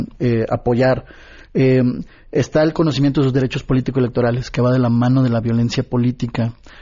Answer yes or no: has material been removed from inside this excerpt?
no